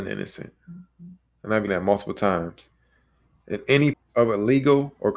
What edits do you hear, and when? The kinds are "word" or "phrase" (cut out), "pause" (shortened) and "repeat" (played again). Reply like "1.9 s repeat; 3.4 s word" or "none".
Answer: 1.7 s word; 3.9 s word